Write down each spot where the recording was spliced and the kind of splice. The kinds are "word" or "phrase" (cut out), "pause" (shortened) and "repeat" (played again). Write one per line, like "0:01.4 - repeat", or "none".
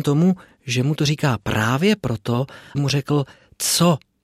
0:02.7 - word